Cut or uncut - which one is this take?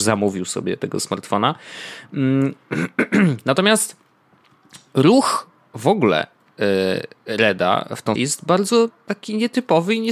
cut